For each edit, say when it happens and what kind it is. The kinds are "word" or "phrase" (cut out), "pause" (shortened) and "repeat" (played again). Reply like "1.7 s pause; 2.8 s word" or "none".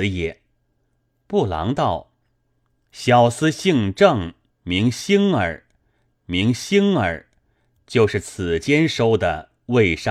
6.1 s repeat

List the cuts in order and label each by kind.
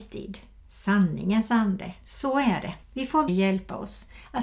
2.0 s pause; 2.8 s pause; 3.3 s word

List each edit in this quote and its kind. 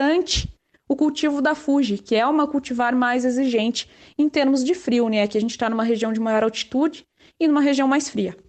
none

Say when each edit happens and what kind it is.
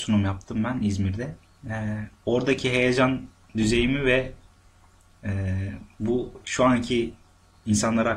none

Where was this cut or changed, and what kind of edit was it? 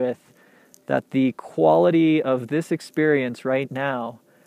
none

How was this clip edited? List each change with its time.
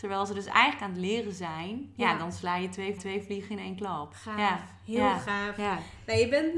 3.0 s repeat

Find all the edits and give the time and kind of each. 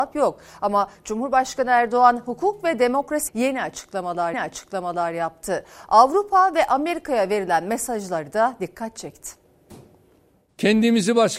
3.3 s phrase; 4.3 s repeat

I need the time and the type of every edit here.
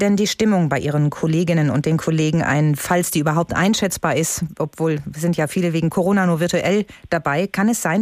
none

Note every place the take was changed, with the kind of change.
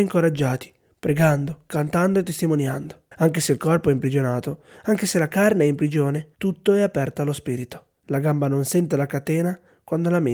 3.1 s pause; 6.3 s pause; 8.0 s pause

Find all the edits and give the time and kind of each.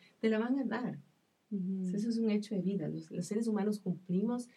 none

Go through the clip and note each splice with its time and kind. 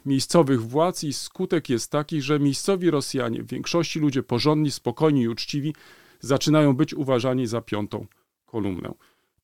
none

